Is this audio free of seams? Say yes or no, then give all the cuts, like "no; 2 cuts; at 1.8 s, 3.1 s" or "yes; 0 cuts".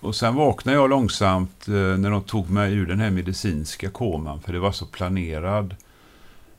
yes; 0 cuts